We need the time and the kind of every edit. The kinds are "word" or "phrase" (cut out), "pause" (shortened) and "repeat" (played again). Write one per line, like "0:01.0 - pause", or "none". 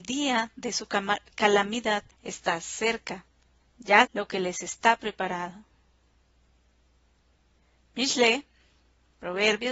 0:02.1 - pause
0:04.0 - phrase